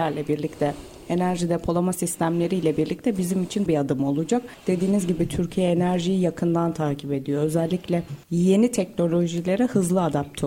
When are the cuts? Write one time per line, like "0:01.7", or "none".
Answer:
0:03.7
0:08.2